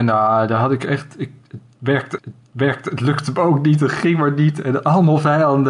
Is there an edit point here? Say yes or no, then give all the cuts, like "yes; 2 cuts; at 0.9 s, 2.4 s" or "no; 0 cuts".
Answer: yes; 1 cut; at 2.2 s